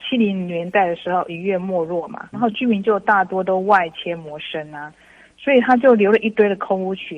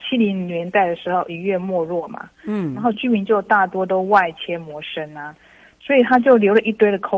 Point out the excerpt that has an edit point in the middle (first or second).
first